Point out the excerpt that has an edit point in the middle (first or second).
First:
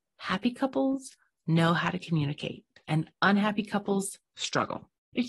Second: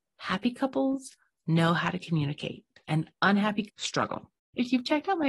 second